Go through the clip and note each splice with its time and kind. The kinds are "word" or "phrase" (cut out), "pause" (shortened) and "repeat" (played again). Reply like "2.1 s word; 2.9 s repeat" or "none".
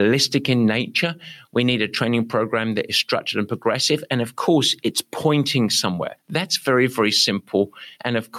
6.2 s pause